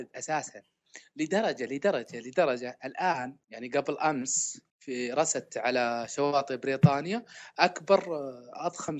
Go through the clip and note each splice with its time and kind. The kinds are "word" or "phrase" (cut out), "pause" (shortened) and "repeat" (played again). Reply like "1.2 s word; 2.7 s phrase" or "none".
3.4 s pause; 4.7 s pause